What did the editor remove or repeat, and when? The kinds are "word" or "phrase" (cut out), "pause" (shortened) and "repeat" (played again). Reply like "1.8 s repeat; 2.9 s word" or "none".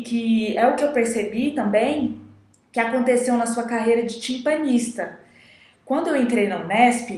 none

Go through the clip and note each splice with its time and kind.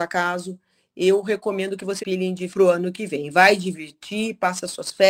2.0 s phrase; 2.5 s word

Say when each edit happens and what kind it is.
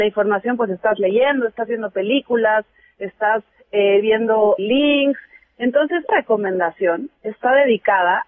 4.6 s word; 6.1 s word

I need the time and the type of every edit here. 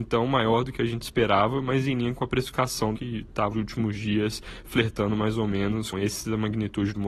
2.9 s word; 3.5 s word; 5.9 s word

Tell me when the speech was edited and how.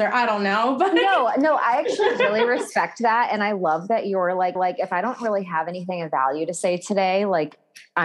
4.6 s repeat

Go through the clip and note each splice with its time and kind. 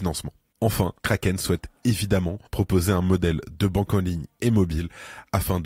1.0 s pause; 2.5 s pause

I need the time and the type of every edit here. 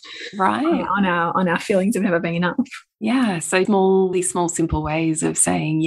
3.6 s word; 4.1 s word

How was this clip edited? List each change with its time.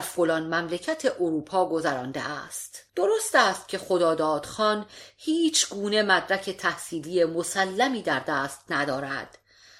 2.9 s pause

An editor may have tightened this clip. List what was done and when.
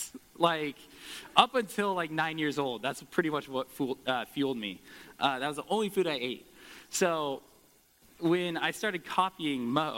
none

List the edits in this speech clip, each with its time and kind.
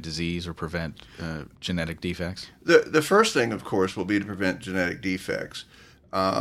1.6 s pause

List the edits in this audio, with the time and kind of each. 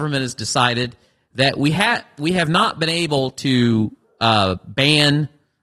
none

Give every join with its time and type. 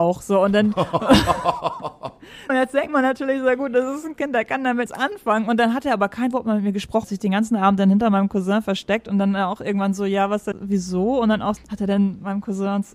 2.5 s word; 4.2 s word; 4.9 s word; 7.0 s word; 10.5 s word; 11.6 s word

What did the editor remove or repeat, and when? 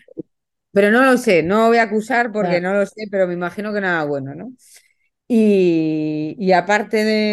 none

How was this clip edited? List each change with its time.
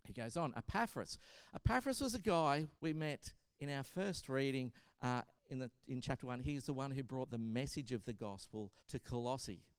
2.8 s pause; 5.4 s pause; 8.8 s pause

